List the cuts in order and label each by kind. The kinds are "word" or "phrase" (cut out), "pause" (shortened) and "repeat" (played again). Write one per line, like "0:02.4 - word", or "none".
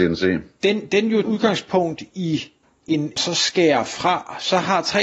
0:01.2 - word
0:03.2 - phrase